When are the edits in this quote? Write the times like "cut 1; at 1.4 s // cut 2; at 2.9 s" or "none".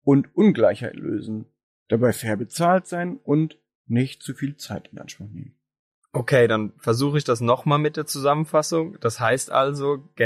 none